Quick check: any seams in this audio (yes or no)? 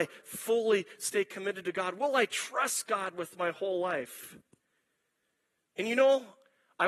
no